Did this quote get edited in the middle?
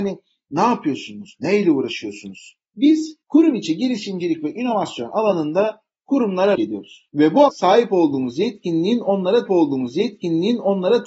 yes; 4 cuts; at 3.2 s, 6.6 s, 7.5 s, 9.5 s

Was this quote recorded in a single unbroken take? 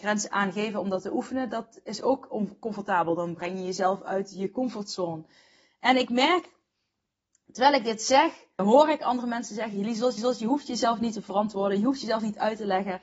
no; 2 cuts; at 8.6 s, 10.2 s

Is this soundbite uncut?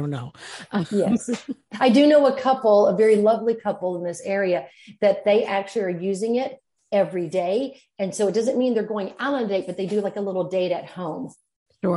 yes; 0 cuts

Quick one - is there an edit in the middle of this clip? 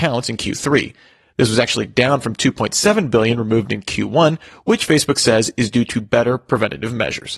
no; 0 cuts

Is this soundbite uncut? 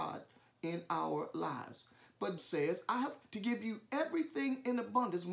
no; 2 cuts; at 2.4 s, 3.2 s

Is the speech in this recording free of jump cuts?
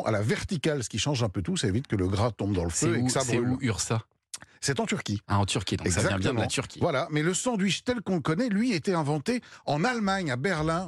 yes; 0 cuts

